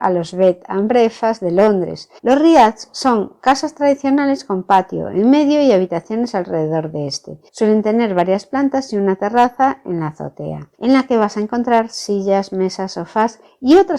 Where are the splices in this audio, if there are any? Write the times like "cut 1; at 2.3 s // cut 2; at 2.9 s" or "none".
cut 1; at 2.2 s // cut 2; at 7.5 s // cut 3; at 10.7 s